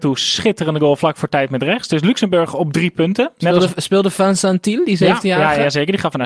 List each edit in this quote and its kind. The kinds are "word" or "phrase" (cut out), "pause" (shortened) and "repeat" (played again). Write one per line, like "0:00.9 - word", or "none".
none